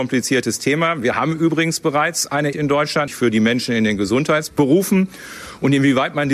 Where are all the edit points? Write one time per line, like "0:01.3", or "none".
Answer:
0:02.5
0:03.1